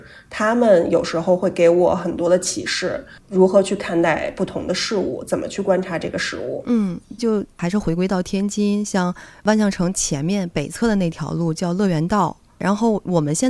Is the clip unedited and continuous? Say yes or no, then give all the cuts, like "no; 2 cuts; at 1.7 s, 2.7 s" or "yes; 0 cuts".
no; 1 cut; at 7.2 s